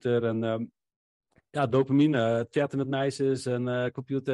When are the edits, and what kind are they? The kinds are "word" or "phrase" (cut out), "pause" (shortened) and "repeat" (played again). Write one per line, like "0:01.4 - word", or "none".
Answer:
none